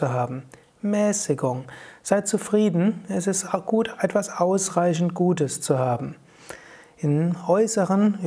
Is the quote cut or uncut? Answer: uncut